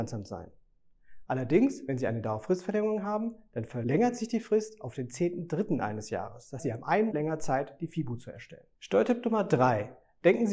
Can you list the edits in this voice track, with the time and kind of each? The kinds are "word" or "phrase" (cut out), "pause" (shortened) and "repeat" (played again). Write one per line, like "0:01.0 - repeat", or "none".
0:06.6 - word
0:07.1 - word
0:08.7 - pause